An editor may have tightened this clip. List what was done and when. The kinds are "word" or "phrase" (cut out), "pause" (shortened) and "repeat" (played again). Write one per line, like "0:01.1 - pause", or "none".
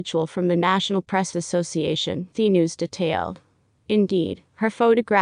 0:01.3 - word
0:02.3 - word